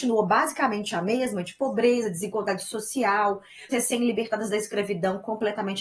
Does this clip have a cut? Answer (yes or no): yes